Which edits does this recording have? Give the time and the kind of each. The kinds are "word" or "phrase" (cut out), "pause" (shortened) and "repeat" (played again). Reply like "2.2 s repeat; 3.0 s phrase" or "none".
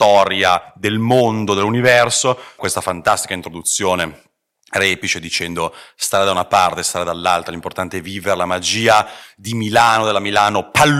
2.6 s phrase